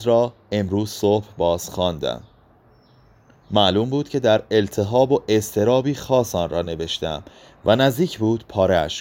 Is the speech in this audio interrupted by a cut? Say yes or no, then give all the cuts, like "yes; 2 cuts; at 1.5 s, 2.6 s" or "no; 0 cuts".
no; 0 cuts